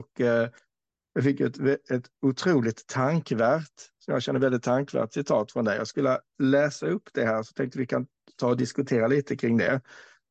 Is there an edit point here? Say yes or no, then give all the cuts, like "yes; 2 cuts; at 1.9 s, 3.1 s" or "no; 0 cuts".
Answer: no; 0 cuts